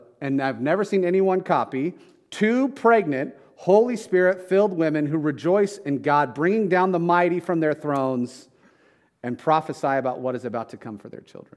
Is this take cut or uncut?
uncut